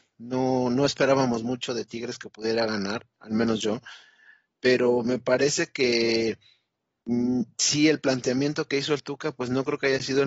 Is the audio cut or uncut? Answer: uncut